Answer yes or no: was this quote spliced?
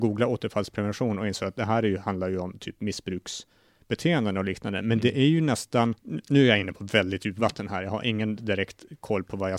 yes